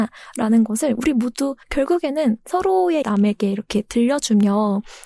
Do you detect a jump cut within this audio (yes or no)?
yes